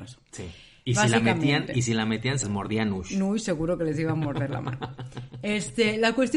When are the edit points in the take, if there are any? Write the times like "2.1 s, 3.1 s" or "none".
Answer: 2.4 s